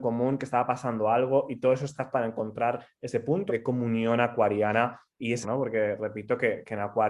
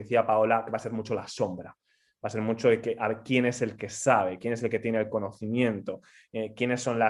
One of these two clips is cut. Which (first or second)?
first